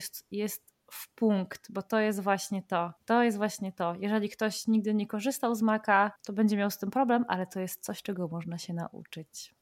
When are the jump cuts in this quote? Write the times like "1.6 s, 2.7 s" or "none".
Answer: 3.0 s, 6.2 s